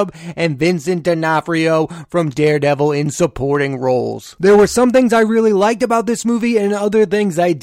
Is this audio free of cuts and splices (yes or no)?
yes